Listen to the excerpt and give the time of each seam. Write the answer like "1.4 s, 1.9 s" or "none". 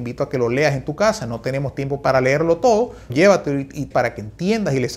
3.1 s, 3.9 s